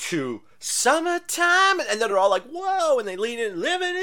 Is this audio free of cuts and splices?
yes; 0 cuts

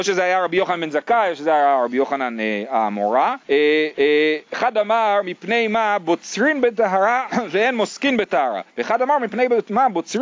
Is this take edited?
yes; 3 cuts; at 3.4 s, 4.0 s, 8.7 s

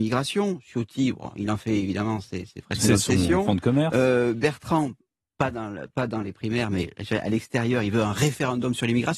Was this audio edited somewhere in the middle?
no; 0 cuts

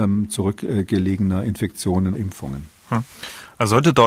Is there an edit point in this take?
yes; 1 cut; at 2.1 s

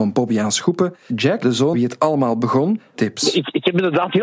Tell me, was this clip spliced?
yes; 4 cuts; at 1.1 s, 1.4 s, 1.7 s, 2.9 s

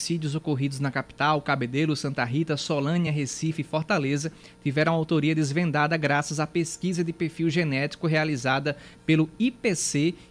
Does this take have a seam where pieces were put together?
no; 0 cuts

